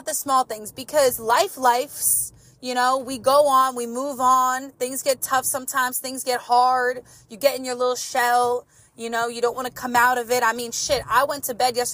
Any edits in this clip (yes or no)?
no